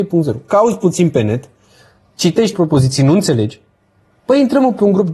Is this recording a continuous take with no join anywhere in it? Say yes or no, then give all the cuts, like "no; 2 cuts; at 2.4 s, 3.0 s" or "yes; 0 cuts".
no; 1 cut; at 2.5 s